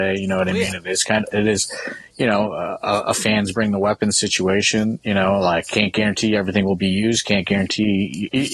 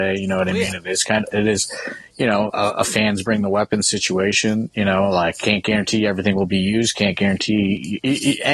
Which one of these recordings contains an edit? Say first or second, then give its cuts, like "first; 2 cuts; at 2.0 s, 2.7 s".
second; 1 cut; at 2.5 s